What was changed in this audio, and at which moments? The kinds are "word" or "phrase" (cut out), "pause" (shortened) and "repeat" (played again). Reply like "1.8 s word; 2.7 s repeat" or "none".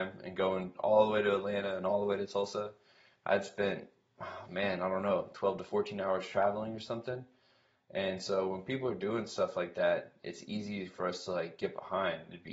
none